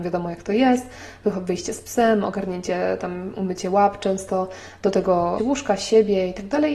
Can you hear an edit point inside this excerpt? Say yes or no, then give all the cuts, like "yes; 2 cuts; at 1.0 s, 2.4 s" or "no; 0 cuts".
yes; 1 cut; at 5.4 s